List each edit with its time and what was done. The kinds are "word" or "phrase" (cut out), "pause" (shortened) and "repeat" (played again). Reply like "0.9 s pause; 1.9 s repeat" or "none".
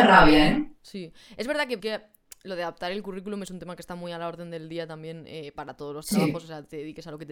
1.8 s phrase